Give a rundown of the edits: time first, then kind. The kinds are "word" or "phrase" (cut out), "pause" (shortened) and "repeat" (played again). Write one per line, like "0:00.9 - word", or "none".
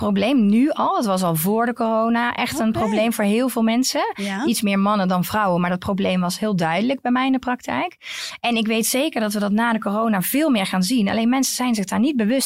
none